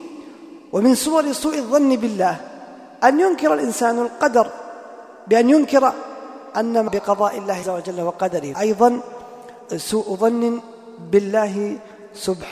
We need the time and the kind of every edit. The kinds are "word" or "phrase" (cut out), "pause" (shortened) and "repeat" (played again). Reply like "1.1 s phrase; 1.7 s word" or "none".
6.9 s word; 7.6 s word; 8.5 s word